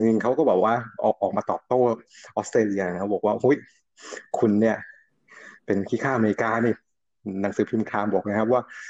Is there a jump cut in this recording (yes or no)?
yes